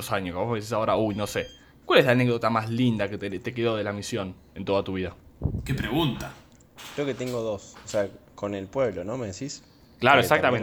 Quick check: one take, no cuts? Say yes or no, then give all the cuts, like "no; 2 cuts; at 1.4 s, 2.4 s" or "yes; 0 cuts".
yes; 0 cuts